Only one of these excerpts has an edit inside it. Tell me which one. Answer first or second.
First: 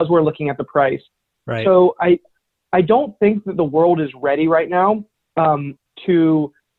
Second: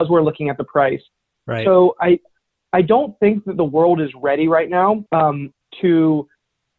second